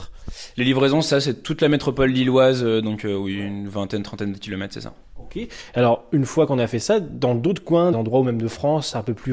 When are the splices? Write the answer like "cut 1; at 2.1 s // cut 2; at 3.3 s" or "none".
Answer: cut 1; at 7.9 s